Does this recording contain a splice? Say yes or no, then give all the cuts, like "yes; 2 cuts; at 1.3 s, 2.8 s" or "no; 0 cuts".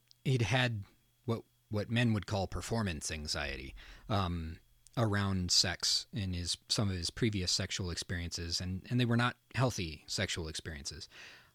yes; 1 cut; at 9.4 s